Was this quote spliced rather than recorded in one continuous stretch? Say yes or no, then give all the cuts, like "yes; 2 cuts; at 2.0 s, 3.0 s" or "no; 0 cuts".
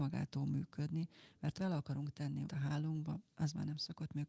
yes; 2 cuts; at 1.6 s, 2.5 s